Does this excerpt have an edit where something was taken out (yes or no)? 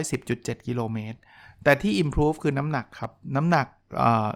no